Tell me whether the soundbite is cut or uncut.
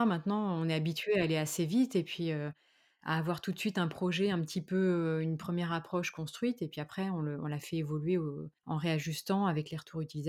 uncut